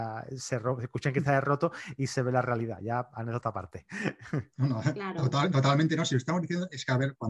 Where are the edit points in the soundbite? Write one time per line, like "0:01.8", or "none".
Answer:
none